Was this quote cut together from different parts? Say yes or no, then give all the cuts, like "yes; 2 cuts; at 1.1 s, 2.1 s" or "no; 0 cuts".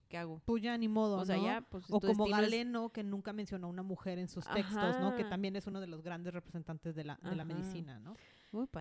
no; 0 cuts